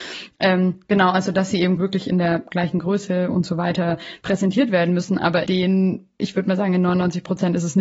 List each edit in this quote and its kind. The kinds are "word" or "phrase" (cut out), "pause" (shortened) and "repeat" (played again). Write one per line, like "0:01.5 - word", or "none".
0:01.8 - word
0:05.5 - word